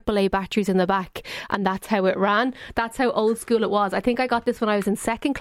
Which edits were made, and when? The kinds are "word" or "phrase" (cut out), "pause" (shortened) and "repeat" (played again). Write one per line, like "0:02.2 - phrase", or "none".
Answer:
none